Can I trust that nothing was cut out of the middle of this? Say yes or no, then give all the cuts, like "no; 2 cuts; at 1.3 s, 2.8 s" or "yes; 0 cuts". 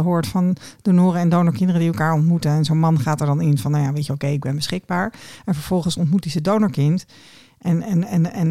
yes; 0 cuts